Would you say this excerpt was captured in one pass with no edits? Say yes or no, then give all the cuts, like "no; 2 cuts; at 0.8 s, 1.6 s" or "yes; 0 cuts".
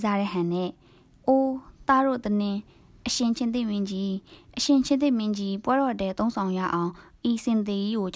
yes; 0 cuts